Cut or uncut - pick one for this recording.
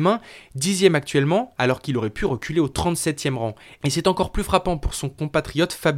uncut